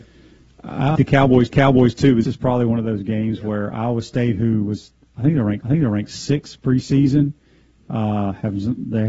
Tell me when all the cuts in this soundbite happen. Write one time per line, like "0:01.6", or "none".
0:01.0
0:01.5
0:02.2
0:05.6